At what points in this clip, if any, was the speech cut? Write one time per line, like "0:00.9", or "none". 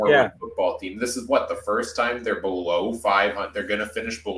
none